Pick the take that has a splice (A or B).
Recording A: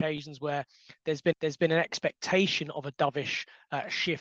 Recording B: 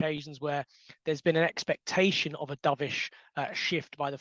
A